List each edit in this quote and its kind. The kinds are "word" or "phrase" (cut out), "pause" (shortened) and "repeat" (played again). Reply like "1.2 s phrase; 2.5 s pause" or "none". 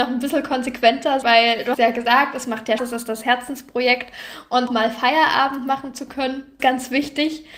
1.2 s word; 1.7 s word; 2.8 s word; 4.7 s word; 6.6 s word